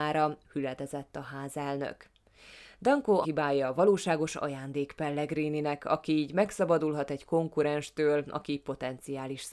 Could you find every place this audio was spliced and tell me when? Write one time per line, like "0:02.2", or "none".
0:03.2